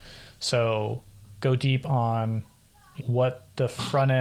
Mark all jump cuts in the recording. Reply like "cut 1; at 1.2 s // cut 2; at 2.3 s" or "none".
cut 1; at 3.0 s